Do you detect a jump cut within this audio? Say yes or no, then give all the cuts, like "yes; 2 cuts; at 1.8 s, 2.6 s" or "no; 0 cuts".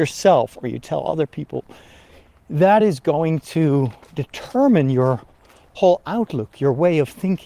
no; 0 cuts